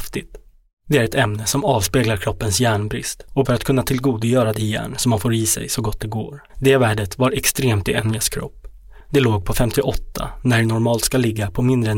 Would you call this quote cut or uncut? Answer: cut